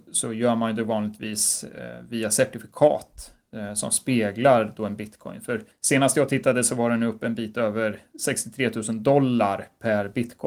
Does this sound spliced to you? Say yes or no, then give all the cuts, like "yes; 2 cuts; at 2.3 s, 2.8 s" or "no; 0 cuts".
yes; 1 cut; at 5.7 s